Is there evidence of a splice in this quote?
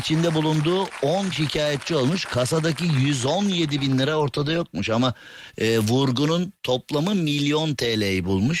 yes; 1 cut; at 1.3 s

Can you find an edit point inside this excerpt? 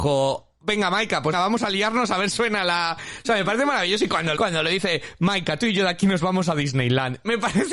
yes; 3 cuts; at 1.3 s, 2.3 s, 4.4 s

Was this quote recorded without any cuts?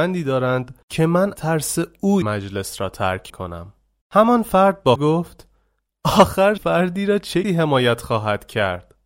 no; 6 cuts; at 1.4 s, 2.2 s, 3.3 s, 5.0 s, 6.6 s, 7.4 s

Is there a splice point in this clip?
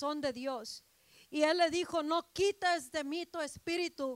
no; 0 cuts

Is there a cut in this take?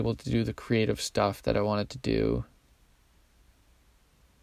no; 0 cuts

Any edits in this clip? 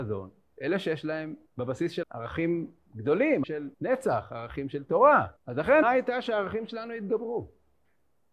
yes; 6 cuts; at 1.5 s, 2.0 s, 3.4 s, 3.7 s, 5.4 s, 5.8 s

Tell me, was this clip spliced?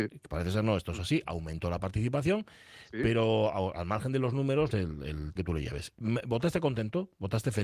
yes; 2 cuts; at 4.7 s, 5.4 s

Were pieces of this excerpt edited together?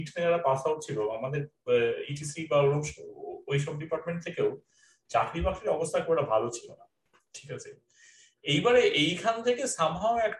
no; 0 cuts

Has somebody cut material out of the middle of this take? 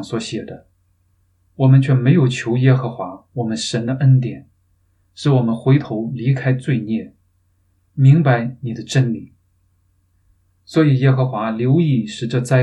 no; 0 cuts

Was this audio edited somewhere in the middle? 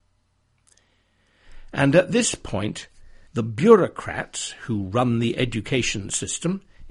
yes; 1 cut; at 3.3 s

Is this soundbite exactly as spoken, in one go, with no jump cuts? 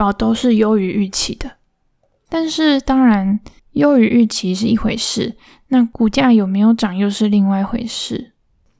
no; 1 cut; at 3.6 s

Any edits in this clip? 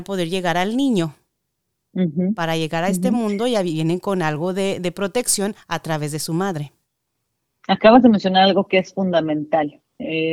no; 0 cuts

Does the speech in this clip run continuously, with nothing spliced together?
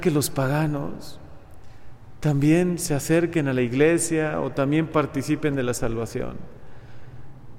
yes; 0 cuts

